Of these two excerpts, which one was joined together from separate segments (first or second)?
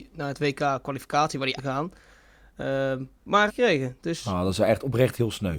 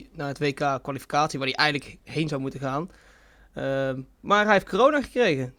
first